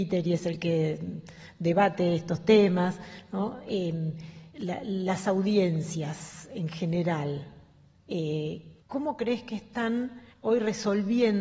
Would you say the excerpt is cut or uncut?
cut